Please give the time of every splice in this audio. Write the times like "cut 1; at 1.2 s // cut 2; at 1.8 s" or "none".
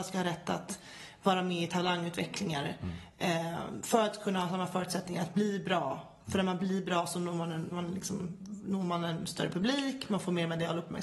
cut 1; at 7.7 s